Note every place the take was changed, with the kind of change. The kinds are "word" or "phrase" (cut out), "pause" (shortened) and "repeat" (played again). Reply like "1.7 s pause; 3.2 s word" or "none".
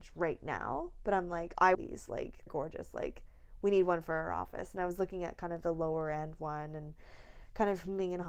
1.7 s phrase; 2.5 s word